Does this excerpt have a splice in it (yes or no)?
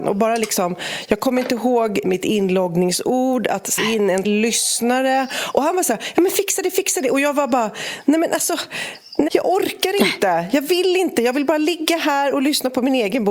yes